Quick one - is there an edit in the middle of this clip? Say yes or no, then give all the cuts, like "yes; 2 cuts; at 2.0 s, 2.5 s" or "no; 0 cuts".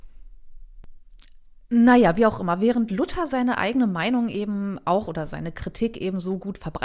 no; 0 cuts